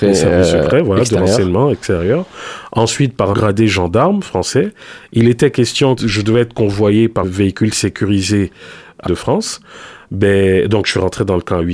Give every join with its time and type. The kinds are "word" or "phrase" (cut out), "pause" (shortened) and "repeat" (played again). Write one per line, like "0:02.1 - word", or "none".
0:03.3 - word
0:06.0 - word
0:07.2 - word
0:09.1 - word